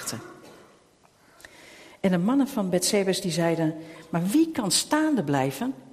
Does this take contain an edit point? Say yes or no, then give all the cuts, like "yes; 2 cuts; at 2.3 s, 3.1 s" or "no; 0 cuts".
no; 0 cuts